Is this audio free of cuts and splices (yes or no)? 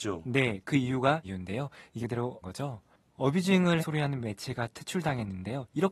no